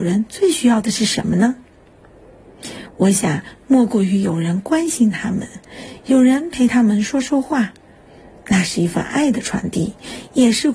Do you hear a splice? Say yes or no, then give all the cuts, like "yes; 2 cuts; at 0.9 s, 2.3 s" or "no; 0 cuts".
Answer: no; 0 cuts